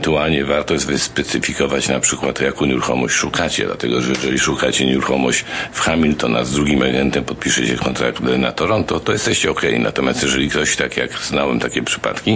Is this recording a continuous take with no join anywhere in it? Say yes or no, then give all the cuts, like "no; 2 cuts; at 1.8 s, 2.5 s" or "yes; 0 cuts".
yes; 0 cuts